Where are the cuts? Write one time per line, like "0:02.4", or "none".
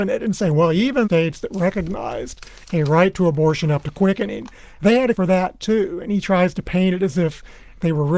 0:01.0
0:05.1